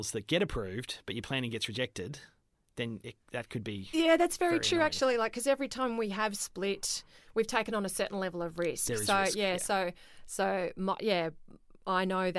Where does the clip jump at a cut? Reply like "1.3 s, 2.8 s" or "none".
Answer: none